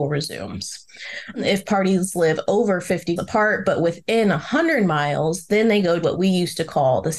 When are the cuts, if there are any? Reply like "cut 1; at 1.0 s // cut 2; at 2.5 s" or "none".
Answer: cut 1; at 3.2 s // cut 2; at 6.0 s